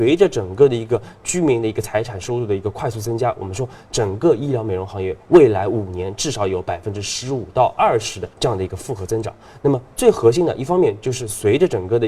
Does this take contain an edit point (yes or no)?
yes